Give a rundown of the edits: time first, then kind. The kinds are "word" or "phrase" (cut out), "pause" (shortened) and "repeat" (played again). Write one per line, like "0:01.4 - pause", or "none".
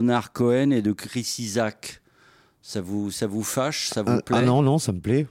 none